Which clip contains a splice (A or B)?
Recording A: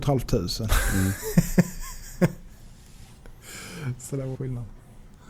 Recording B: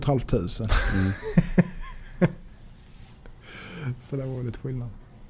A